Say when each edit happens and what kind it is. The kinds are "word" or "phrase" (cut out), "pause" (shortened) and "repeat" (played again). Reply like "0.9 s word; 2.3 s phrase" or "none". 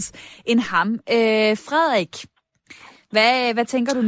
none